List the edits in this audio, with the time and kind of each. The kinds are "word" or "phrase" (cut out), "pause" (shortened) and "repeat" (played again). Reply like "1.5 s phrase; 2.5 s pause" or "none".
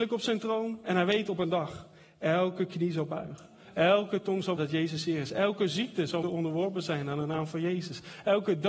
4.6 s word; 6.2 s word